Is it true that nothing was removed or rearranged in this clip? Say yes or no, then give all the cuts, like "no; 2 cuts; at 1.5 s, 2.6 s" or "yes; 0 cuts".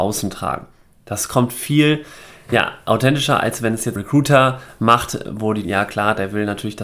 no; 2 cuts; at 4.0 s, 5.6 s